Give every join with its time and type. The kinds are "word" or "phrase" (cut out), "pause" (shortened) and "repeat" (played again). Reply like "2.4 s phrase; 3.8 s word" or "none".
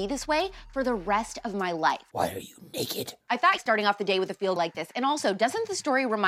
2.1 s pause; 3.6 s phrase; 4.6 s phrase

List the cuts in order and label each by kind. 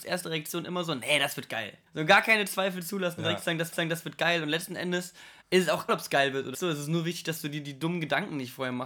1.9 s pause; 3.7 s repeat; 5.4 s word; 5.9 s word; 6.5 s word

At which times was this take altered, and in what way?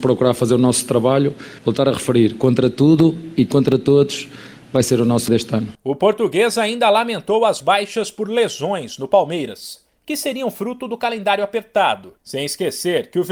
1.6 s pause; 5.3 s word; 7.6 s word; 12.2 s pause

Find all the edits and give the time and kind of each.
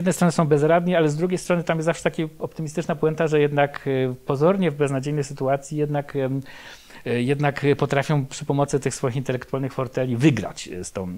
none

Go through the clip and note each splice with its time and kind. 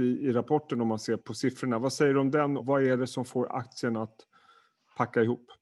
1.2 s word; 2.6 s word

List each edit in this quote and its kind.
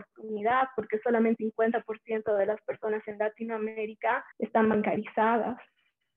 1.4 s word; 4.3 s pause

